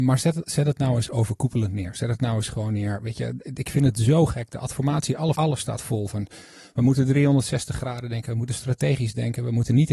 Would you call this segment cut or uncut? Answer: cut